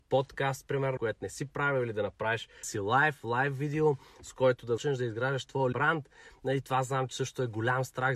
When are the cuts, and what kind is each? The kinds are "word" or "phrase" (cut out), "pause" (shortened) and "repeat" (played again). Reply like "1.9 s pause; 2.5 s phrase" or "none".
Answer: 1.0 s word; 2.6 s word; 4.8 s word; 5.7 s word